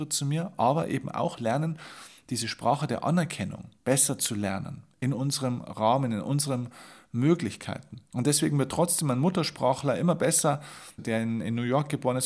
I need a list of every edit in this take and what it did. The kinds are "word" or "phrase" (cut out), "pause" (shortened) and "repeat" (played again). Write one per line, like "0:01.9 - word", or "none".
0:03.8 - pause
0:08.1 - pause
0:11.0 - word